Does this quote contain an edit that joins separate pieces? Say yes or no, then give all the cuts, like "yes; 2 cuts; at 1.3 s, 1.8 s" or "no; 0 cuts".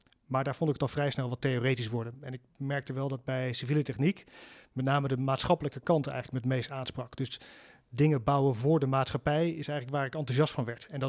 no; 0 cuts